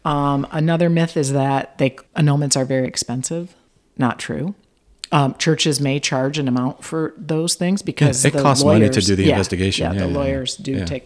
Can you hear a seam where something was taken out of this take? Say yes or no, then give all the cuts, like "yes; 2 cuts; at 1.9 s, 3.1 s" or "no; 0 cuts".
yes; 2 cuts; at 2.1 s, 3.7 s